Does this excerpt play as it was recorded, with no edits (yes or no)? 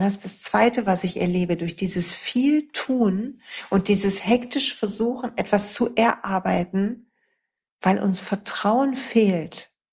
yes